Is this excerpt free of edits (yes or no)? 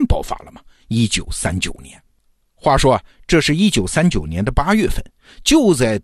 yes